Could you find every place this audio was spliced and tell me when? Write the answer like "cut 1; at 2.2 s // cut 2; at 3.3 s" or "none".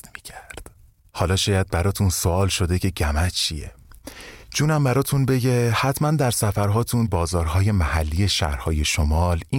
cut 1; at 4.4 s // cut 2; at 7.1 s